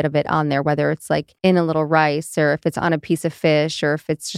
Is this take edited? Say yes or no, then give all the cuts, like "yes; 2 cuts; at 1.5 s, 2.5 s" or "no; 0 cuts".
yes; 1 cut; at 1.4 s